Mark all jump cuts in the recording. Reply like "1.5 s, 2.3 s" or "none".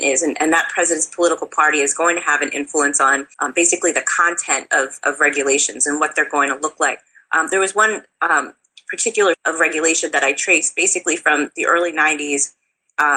3.3 s, 9.3 s

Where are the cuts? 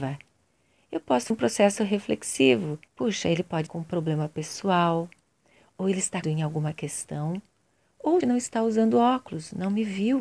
1.3 s, 2.9 s, 3.7 s, 6.2 s, 8.2 s

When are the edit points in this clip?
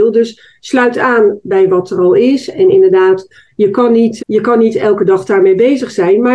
4.2 s

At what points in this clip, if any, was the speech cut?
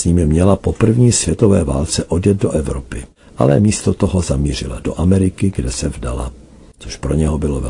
none

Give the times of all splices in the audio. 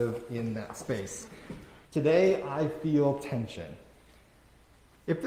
1.8 s

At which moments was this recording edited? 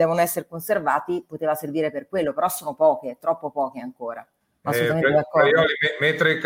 4.4 s

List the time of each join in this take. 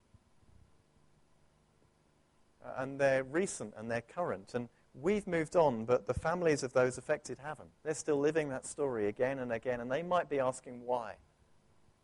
7.7 s

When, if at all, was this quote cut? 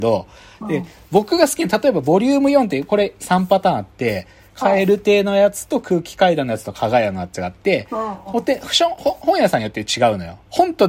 3.2 s

